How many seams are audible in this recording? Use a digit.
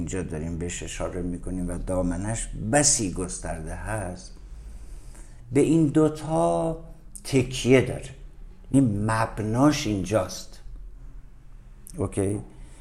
1